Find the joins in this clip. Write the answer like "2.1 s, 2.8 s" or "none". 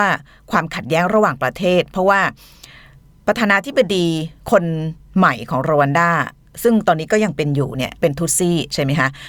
8.0 s